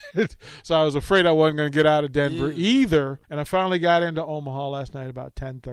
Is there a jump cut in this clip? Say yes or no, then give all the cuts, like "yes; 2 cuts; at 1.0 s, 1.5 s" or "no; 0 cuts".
yes; 1 cut; at 3.2 s